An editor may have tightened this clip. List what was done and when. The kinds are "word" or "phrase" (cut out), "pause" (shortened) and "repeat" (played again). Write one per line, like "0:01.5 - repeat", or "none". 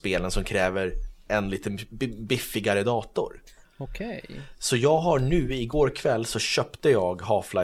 none